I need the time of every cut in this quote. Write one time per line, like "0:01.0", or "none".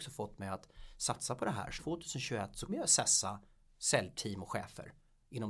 0:01.8
0:02.7